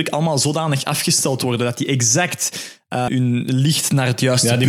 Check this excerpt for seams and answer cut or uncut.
cut